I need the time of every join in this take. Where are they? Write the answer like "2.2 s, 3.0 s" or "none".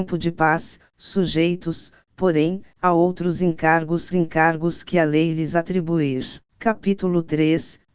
4.1 s, 6.5 s